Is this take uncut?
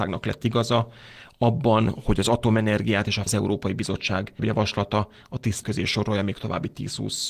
no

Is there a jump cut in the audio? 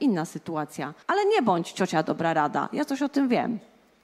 yes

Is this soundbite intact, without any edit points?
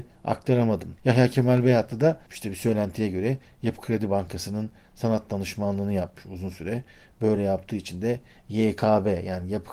yes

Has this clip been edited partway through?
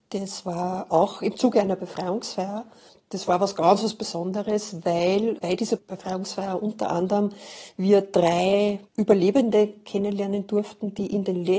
yes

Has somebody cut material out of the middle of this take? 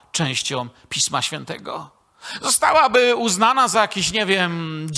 no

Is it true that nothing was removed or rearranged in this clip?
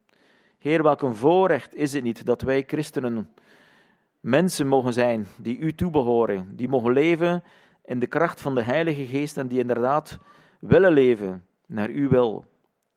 yes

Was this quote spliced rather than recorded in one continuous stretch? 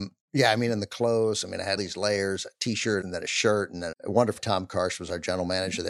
yes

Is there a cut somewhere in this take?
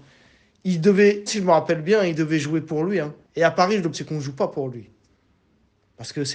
yes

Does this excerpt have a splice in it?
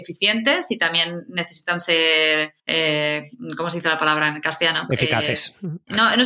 yes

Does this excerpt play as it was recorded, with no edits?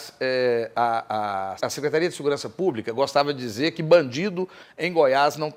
no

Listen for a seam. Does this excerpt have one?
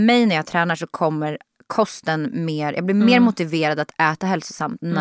no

